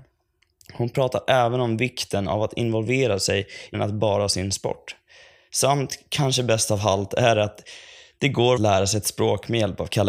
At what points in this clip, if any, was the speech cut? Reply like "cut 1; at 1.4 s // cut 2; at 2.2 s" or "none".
cut 1; at 3.7 s // cut 2; at 4.3 s // cut 3; at 8.6 s